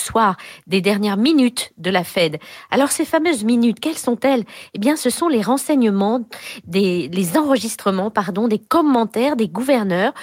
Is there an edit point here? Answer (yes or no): no